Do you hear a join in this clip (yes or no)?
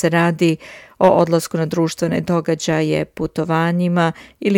no